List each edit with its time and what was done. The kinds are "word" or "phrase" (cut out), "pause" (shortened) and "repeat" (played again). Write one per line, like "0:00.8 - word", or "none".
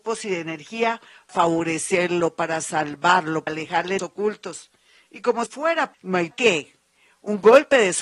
0:01.3 - word
0:03.5 - word
0:04.0 - word
0:05.5 - word
0:05.9 - word
0:06.3 - word